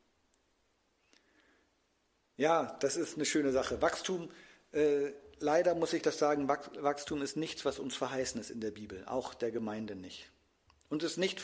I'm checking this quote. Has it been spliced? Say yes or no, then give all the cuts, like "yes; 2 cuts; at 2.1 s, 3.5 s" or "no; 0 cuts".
no; 0 cuts